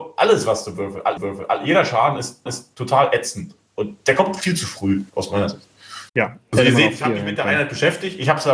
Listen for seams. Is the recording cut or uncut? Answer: cut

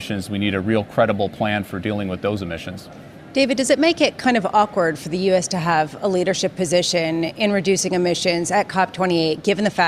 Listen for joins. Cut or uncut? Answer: uncut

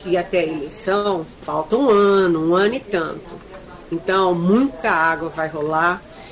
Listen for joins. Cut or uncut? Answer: cut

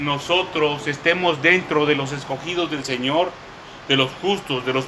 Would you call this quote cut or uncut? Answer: uncut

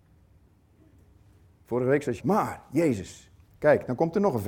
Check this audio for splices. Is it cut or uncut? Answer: cut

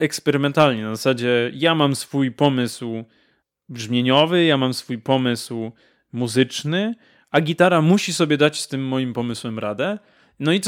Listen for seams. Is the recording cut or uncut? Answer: uncut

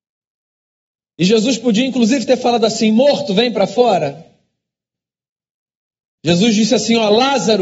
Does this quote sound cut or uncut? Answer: uncut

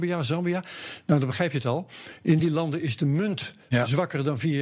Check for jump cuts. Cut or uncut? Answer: uncut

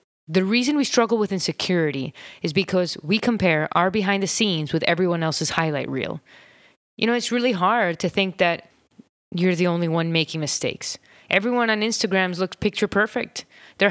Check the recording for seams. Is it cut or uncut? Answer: uncut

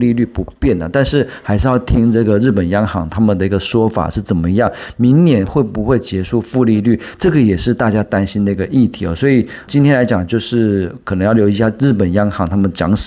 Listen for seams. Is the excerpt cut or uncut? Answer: cut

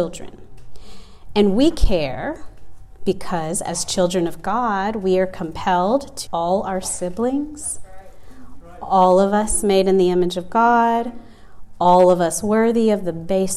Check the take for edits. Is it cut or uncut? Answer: cut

